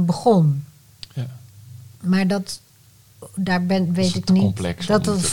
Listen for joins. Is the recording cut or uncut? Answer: cut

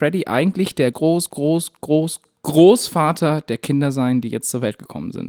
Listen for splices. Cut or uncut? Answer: cut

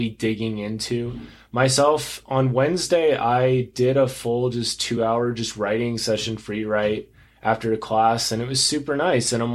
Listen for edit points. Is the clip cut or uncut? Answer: uncut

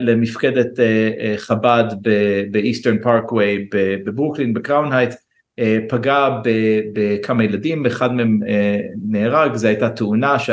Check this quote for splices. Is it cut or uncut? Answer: uncut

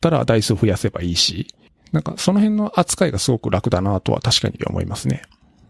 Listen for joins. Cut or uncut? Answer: cut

